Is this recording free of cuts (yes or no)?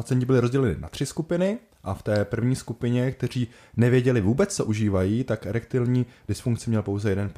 yes